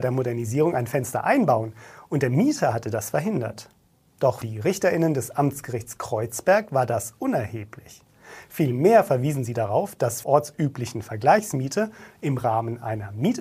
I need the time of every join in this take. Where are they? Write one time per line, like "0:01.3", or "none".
0:04.4
0:10.2